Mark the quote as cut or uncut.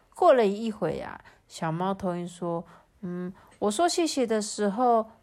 uncut